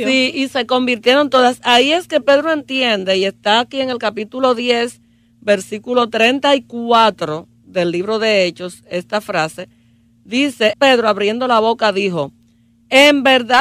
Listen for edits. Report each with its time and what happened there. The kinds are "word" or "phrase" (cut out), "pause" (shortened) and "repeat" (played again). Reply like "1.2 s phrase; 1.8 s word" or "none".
10.7 s word